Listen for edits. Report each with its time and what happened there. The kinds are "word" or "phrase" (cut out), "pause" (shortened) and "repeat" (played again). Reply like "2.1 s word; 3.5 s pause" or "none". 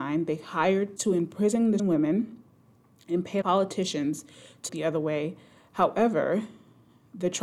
1.0 s word; 1.8 s word; 3.4 s word; 4.7 s word